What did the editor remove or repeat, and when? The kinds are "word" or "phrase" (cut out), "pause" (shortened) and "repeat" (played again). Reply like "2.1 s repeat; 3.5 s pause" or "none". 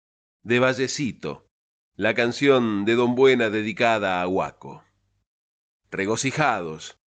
none